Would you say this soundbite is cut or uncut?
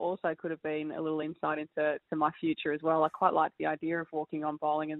uncut